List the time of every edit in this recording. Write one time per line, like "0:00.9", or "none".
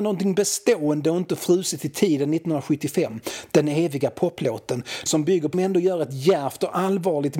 0:05.1
0:05.5

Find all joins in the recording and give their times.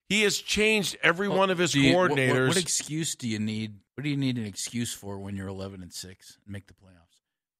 0:03.9

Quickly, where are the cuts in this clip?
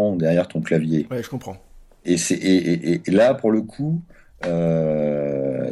none

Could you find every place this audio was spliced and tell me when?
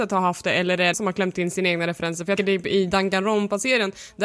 0:00.9
0:02.4

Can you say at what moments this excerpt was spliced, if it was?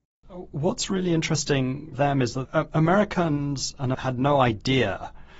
0:01.9
0:02.4
0:03.9

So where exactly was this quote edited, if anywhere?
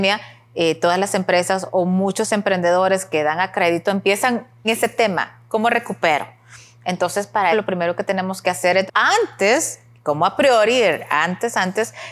0:04.6
0:07.5
0:08.9

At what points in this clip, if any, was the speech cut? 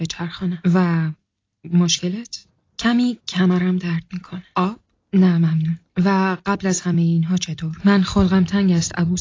none

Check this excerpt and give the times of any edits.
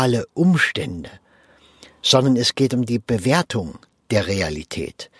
none

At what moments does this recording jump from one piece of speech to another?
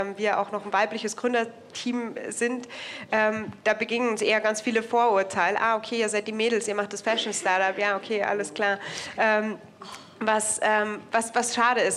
none

